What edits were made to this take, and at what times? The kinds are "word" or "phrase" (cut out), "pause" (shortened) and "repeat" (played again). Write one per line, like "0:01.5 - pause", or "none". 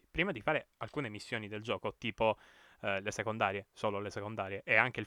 none